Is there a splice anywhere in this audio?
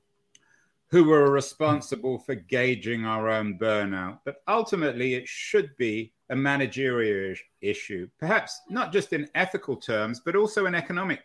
yes; 1 cut; at 6.2 s

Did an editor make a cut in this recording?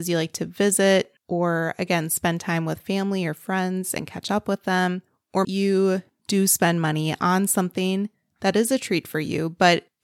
yes; 3 cuts; at 1.2 s, 5.4 s, 8.1 s

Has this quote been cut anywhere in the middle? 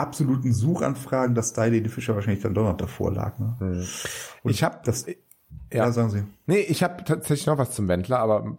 no; 0 cuts

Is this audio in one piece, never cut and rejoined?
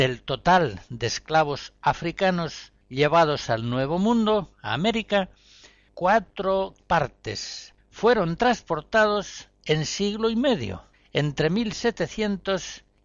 no; 2 cuts; at 6.8 s, 10.9 s

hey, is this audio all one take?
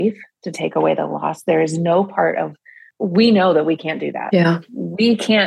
yes; 0 cuts

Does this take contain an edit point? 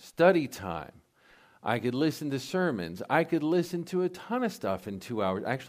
no; 0 cuts

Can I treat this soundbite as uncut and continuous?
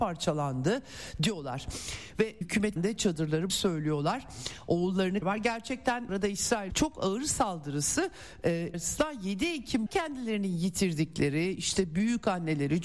no; 8 cuts; at 2.4 s, 2.8 s, 3.5 s, 5.2 s, 6.1 s, 6.7 s, 8.7 s, 9.9 s

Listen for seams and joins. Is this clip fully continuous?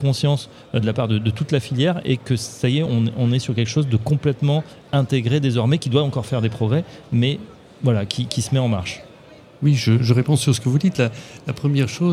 yes; 0 cuts

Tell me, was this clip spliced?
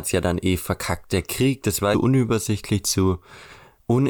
yes; 1 cut; at 1.9 s

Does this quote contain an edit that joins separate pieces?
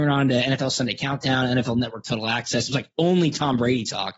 no; 0 cuts

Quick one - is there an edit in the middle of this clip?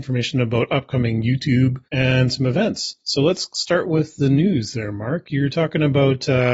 yes; 2 cuts; at 1.8 s, 3.0 s

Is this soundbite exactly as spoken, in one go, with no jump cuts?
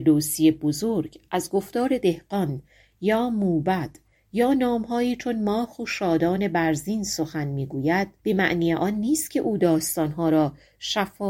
no; 1 cut; at 8.2 s

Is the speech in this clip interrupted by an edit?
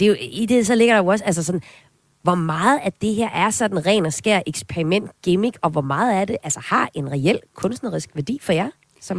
no; 0 cuts

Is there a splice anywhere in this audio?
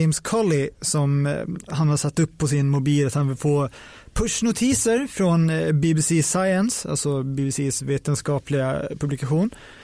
no; 0 cuts

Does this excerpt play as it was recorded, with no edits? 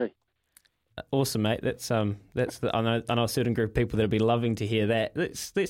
yes; 0 cuts

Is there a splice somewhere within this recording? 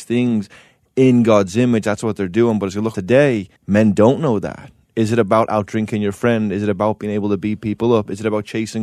yes; 2 cuts; at 2.9 s, 3.6 s

